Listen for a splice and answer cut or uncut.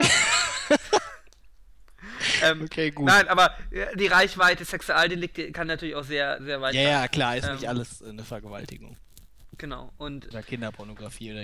cut